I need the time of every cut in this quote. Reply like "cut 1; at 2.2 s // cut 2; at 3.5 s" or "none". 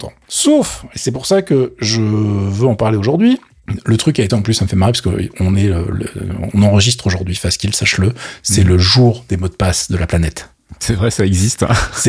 cut 1; at 4.3 s